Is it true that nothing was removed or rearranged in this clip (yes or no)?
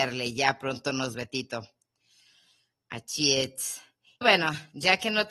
no